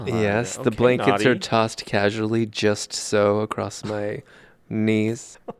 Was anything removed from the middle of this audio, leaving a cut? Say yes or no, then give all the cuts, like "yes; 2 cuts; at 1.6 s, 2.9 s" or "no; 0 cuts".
no; 0 cuts